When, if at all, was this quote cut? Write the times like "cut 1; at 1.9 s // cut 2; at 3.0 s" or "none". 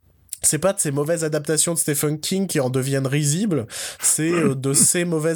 none